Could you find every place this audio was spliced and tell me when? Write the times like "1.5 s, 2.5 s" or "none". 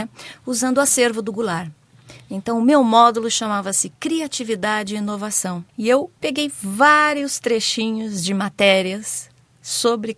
5.7 s